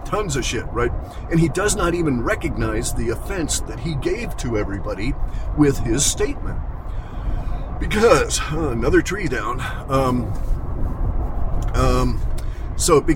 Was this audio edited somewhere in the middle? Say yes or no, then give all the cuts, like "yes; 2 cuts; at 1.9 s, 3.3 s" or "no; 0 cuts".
no; 0 cuts